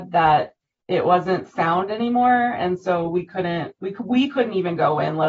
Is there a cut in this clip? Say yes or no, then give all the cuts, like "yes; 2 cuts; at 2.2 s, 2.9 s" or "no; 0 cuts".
no; 0 cuts